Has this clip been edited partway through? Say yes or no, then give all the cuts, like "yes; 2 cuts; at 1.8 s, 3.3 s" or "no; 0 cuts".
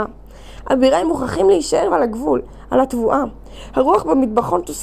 yes; 2 cuts; at 1.0 s, 1.9 s